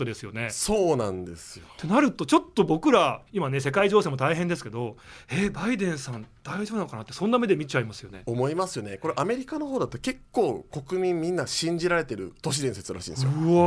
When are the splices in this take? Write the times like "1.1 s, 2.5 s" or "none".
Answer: 3.3 s, 12.4 s